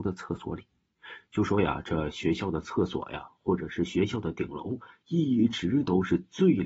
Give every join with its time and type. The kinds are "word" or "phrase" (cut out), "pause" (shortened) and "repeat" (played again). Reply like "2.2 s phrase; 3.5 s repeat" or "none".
none